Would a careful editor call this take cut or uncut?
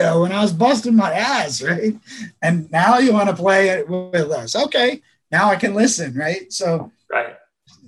uncut